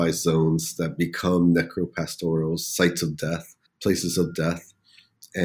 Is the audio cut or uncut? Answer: cut